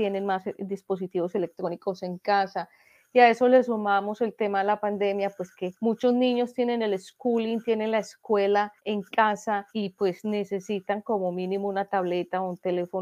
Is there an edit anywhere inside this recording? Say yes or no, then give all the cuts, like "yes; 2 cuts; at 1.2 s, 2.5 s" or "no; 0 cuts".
yes; 3 cuts; at 5.8 s, 8.8 s, 9.7 s